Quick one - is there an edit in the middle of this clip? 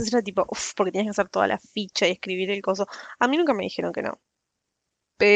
no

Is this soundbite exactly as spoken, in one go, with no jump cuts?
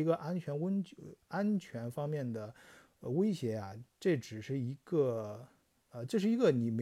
yes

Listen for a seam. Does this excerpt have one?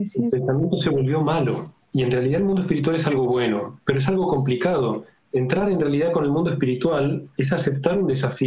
no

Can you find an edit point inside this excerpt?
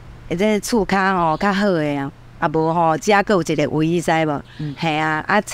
no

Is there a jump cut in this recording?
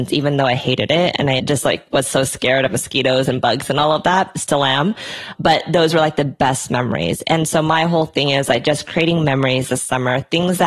yes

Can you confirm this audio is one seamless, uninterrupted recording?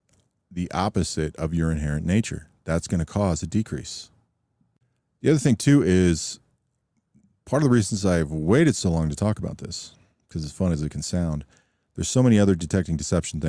yes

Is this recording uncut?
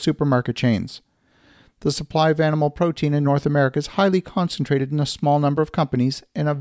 yes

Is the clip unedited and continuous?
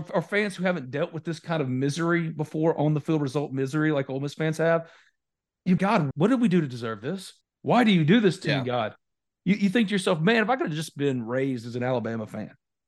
no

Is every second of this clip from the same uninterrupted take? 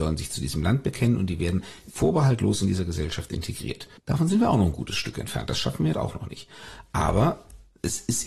no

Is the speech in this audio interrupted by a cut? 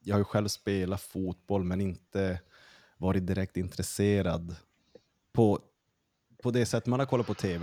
no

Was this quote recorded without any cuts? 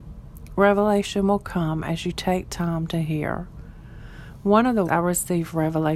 no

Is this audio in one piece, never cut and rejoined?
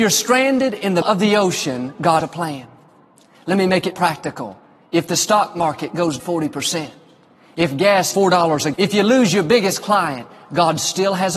no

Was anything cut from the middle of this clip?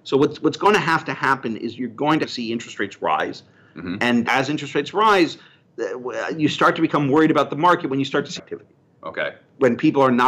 yes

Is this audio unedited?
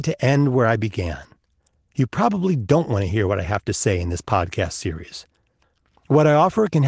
yes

